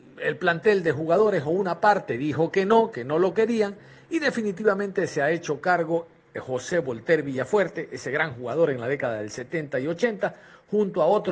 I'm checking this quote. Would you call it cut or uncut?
uncut